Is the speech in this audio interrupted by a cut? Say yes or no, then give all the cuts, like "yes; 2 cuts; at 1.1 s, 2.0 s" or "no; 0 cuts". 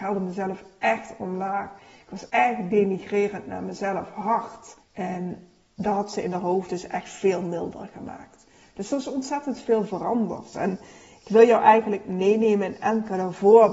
yes; 2 cuts; at 2.3 s, 4.8 s